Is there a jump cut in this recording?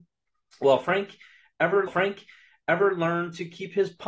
yes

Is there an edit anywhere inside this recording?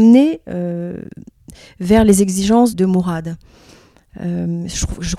yes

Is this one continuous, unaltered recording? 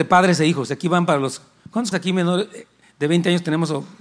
no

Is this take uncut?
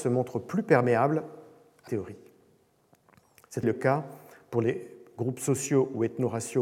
no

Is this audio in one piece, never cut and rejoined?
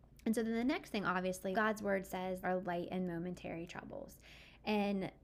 no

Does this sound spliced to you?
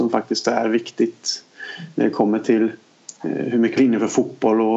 yes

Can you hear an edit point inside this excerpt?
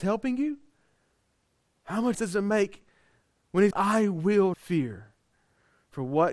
yes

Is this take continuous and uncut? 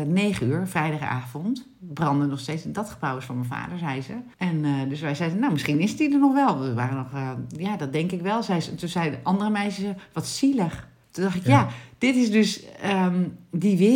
no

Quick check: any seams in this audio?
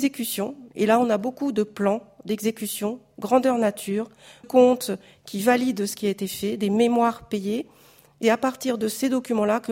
yes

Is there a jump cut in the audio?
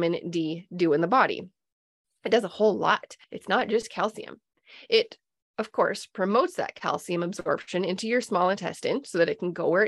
yes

